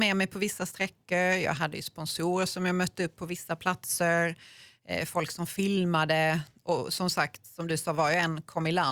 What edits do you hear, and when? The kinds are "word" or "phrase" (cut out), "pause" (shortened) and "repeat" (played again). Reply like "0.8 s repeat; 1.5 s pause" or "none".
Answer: none